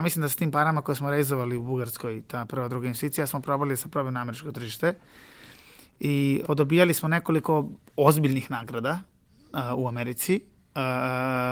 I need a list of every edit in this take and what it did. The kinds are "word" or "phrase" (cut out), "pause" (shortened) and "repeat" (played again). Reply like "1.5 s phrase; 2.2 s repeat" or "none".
6.4 s word